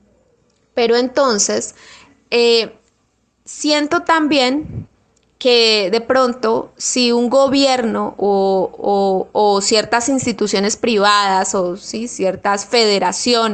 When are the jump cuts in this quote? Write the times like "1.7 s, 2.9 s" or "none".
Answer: none

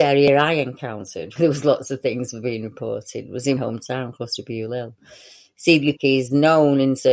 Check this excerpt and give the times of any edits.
1.4 s, 3.6 s, 6.0 s

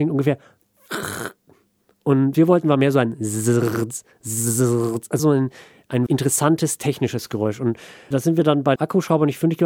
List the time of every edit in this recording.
2.3 s, 5.2 s, 6.1 s, 8.1 s, 8.8 s

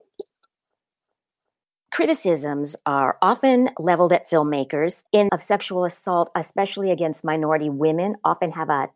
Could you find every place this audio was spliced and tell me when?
5.3 s

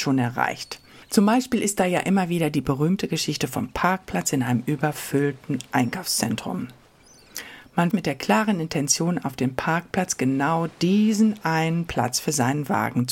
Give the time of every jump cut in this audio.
7.9 s

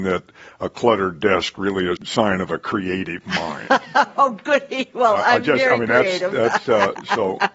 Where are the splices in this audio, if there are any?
2.0 s

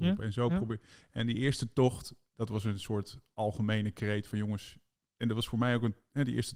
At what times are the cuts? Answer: none

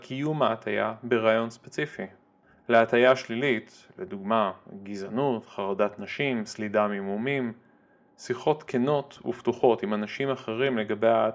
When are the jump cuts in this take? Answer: none

